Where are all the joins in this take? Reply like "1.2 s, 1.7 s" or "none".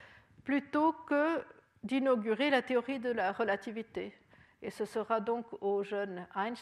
none